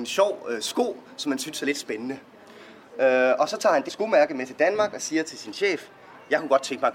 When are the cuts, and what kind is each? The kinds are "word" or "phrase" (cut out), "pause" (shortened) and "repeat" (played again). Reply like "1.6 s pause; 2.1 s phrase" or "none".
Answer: 3.9 s word